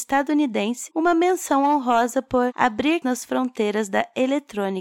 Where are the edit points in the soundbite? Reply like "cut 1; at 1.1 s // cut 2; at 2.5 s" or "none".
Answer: cut 1; at 3.0 s